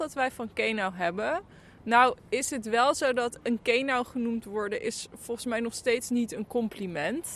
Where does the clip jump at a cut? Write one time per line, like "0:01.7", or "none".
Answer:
none